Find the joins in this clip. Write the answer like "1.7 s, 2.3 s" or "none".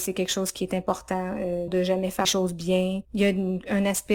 1.7 s, 2.2 s, 3.0 s